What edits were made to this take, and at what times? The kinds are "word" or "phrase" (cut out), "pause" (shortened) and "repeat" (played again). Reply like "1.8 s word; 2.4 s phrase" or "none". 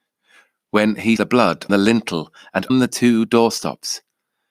1.2 s word; 1.7 s word; 2.7 s word